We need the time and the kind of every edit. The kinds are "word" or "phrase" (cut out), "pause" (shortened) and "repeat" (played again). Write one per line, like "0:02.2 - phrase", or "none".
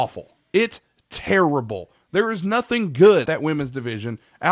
0:03.3 - word